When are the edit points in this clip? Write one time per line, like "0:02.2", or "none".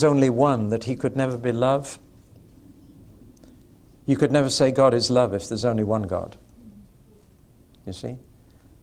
none